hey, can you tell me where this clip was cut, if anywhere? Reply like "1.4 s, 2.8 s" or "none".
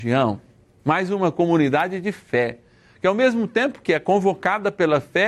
none